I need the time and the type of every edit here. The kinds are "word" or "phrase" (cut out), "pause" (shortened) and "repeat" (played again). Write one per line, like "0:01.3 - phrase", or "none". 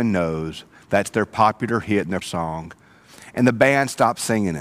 0:02.2 - word